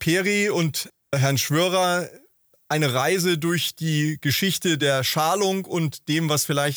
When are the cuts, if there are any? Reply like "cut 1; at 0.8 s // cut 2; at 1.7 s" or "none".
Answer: none